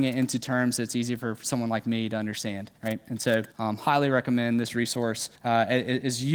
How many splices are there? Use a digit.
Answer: 3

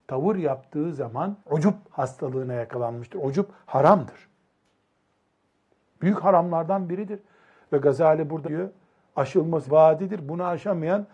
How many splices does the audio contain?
3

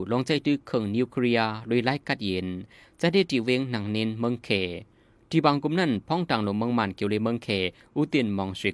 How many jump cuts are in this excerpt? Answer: 0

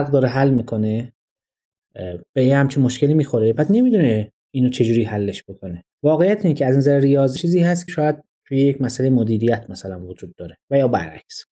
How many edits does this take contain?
4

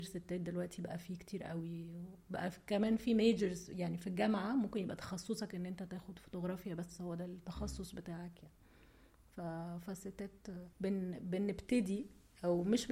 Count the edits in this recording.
1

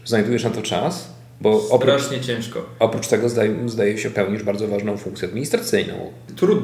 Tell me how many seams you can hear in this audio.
0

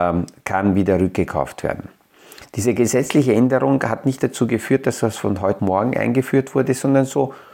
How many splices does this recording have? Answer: 1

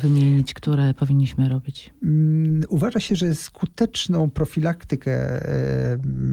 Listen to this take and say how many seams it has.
0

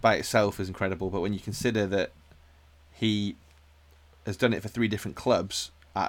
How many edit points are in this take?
0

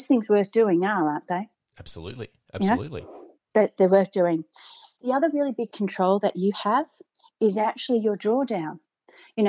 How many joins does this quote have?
0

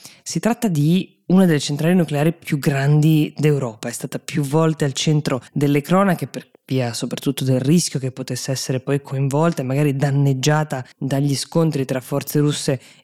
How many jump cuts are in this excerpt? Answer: 2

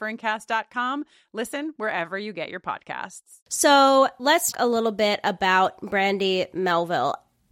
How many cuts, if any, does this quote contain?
2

